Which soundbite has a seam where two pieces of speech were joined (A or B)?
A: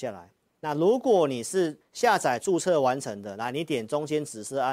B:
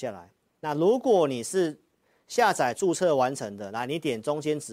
A